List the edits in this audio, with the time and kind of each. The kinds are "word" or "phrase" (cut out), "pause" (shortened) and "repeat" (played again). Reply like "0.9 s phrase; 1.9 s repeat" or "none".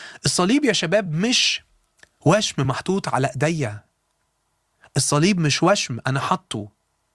none